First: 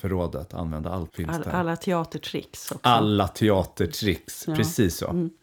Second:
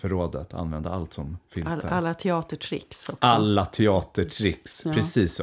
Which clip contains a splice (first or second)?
first